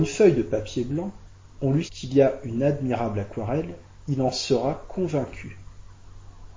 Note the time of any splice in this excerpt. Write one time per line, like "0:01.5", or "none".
0:01.9